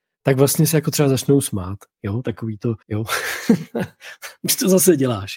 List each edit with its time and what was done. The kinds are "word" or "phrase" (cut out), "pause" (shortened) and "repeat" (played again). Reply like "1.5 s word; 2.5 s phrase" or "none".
2.8 s pause